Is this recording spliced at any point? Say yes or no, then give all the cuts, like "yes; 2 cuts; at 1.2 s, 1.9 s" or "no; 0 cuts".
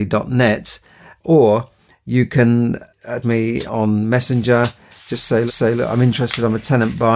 yes; 3 cuts; at 3.2 s, 3.7 s, 5.5 s